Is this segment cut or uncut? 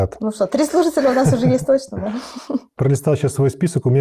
uncut